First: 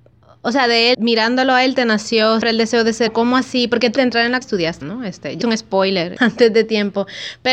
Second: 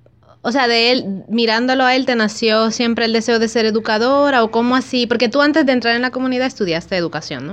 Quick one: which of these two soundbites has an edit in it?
first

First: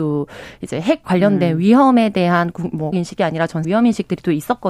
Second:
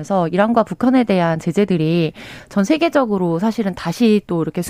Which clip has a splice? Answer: first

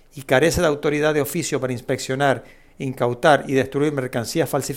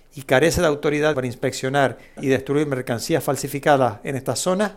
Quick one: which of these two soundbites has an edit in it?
second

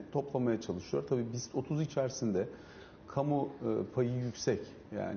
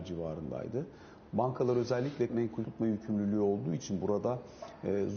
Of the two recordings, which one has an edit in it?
second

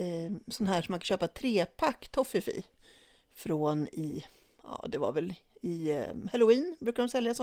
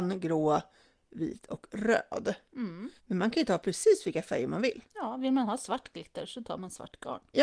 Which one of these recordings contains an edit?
second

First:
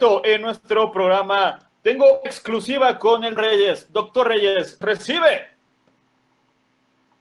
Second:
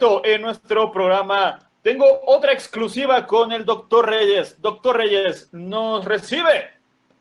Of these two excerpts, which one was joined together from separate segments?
first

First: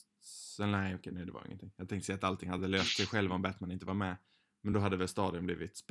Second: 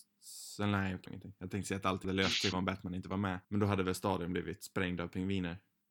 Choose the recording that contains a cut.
second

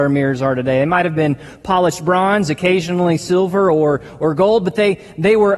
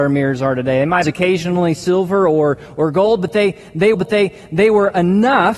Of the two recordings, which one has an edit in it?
second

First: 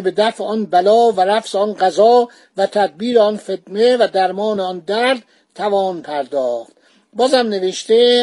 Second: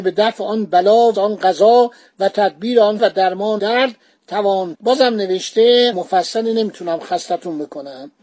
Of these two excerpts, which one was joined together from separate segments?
second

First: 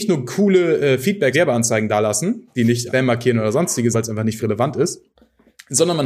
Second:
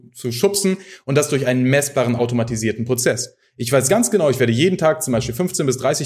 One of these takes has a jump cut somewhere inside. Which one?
first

